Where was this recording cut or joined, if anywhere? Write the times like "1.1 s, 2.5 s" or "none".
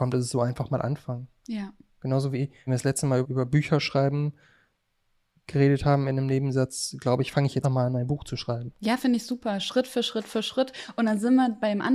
2.7 s, 3.2 s, 7.6 s

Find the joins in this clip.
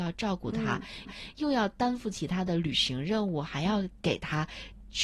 1.0 s

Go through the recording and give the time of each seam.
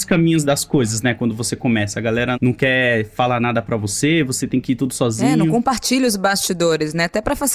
2.3 s

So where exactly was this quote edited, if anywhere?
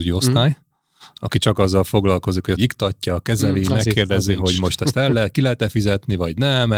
2.6 s

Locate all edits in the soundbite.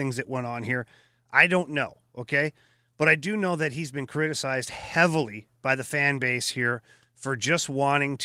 none

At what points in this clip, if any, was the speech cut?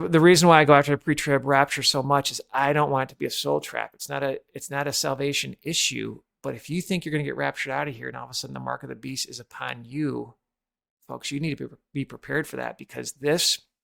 none

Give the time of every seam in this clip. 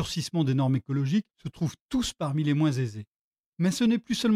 none

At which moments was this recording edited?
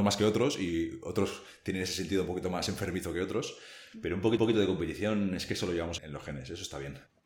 4.4 s, 6.0 s

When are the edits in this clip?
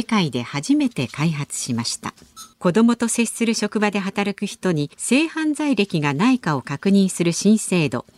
2.5 s, 4.9 s

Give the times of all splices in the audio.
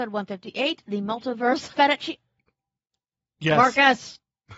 1.7 s

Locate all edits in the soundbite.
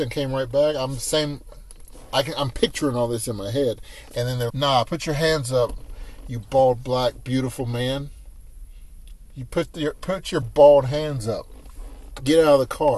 4.5 s, 10.4 s

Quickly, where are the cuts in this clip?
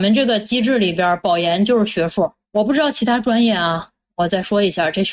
none

